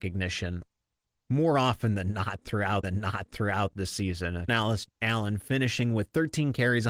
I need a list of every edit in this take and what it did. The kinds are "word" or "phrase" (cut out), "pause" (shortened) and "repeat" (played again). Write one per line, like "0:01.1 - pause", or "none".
0:02.8 - repeat
0:04.5 - word